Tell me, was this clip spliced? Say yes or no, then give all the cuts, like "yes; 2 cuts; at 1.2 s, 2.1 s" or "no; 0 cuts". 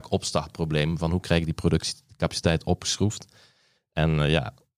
no; 0 cuts